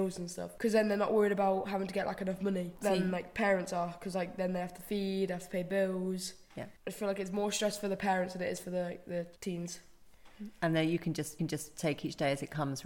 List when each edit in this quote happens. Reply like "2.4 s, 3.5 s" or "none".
6.8 s, 9.4 s, 11.4 s